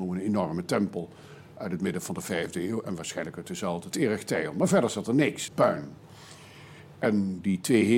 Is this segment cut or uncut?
cut